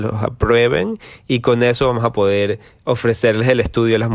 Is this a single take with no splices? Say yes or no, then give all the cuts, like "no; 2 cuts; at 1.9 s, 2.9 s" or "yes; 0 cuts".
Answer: yes; 0 cuts